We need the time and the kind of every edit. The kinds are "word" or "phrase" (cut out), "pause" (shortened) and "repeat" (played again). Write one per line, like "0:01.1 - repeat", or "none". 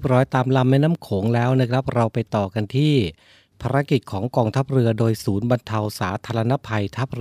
none